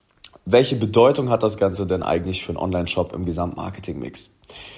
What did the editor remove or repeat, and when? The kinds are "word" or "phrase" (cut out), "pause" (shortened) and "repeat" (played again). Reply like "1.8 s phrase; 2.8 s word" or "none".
none